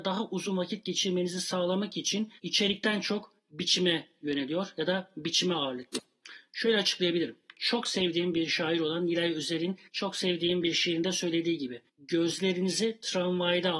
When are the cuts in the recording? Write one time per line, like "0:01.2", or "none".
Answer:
0:02.4
0:03.4
0:09.9
0:11.9